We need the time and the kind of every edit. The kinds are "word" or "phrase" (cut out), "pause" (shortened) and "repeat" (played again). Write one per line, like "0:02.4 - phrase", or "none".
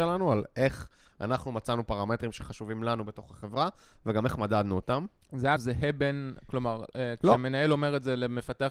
0:05.6 - word